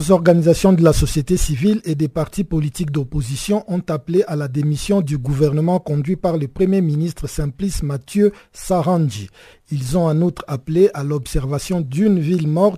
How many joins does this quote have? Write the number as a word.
zero